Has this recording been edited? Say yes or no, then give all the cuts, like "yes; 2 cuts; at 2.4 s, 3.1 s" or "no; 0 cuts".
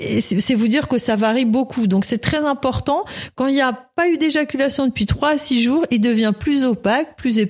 no; 0 cuts